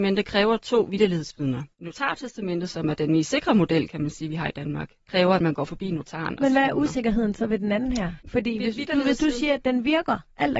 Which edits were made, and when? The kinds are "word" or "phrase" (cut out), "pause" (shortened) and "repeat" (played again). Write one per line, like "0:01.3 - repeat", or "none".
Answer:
0:01.7 - pause
0:05.0 - pause
0:08.2 - pause